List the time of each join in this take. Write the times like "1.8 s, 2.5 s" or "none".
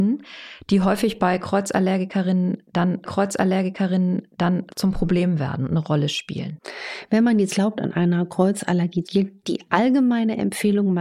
3.0 s, 7.5 s, 9.0 s